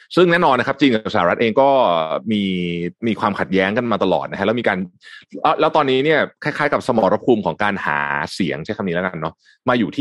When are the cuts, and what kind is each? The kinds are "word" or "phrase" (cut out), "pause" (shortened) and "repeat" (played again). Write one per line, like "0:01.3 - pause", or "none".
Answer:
0:03.0 - pause